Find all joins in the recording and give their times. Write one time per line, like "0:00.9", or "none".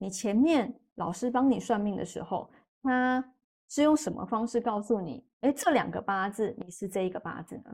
none

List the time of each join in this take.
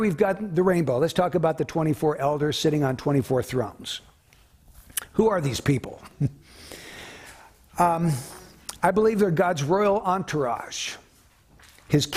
none

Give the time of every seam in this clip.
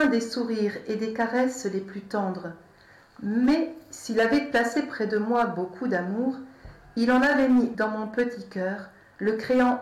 0:07.7

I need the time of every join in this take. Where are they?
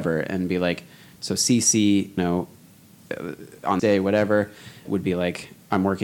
0:02.2
0:03.8
0:04.9

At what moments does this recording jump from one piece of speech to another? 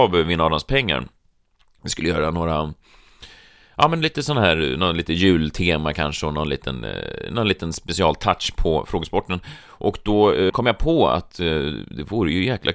none

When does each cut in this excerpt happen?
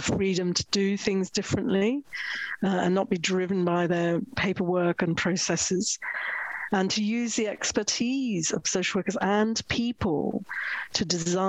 none

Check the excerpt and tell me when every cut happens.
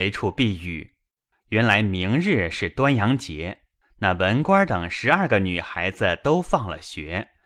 0:01.3
0:03.8

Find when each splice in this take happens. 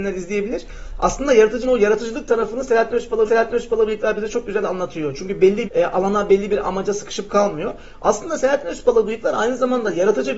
0:01.6
0:03.3
0:05.6

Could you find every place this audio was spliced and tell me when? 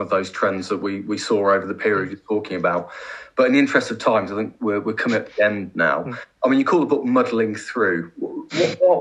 none

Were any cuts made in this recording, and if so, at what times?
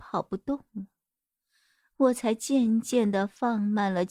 none

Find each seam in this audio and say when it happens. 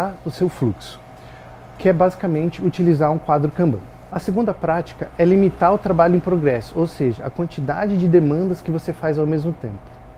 none

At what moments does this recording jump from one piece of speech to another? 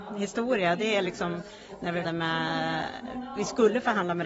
0:02.0

